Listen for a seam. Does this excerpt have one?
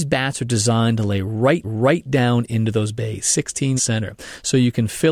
yes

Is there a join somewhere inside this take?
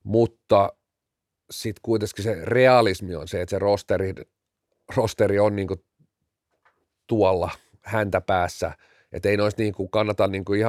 no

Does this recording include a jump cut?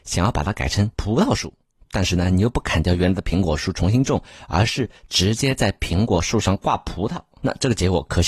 no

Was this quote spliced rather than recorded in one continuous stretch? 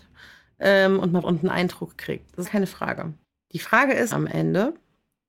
yes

